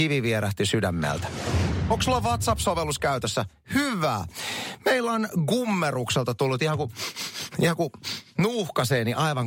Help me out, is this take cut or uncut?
uncut